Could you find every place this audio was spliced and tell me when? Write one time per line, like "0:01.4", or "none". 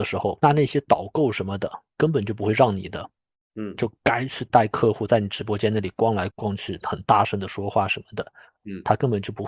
none